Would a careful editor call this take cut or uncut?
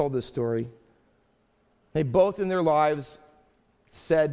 uncut